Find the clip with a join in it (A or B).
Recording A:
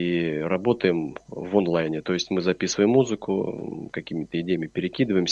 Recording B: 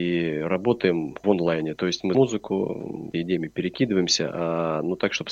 B